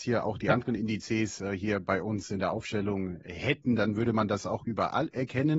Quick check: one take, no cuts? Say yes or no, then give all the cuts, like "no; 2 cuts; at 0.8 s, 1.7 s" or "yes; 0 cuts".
yes; 0 cuts